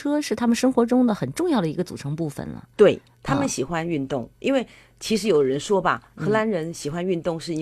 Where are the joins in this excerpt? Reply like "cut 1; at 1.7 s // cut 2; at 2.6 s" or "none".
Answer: none